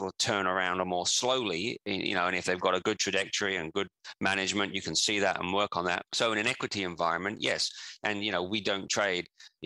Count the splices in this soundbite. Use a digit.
1